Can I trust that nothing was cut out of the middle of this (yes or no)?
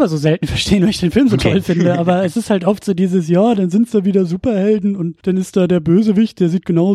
no